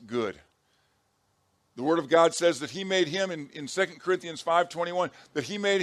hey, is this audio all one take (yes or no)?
yes